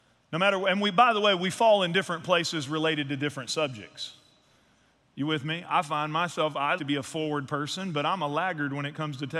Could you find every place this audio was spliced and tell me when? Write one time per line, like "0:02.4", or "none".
0:06.8